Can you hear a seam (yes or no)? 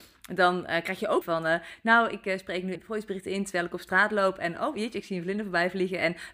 yes